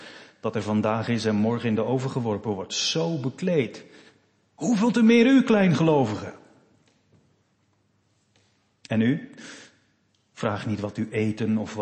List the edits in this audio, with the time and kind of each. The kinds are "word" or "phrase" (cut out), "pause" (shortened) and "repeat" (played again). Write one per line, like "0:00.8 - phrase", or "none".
none